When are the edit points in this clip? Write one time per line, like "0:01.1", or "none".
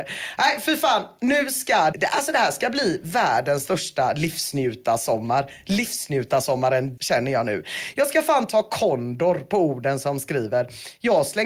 0:01.9
0:07.0